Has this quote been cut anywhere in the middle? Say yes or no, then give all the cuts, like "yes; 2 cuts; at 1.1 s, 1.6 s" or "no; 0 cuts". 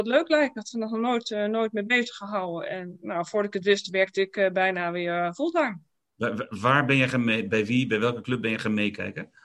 no; 0 cuts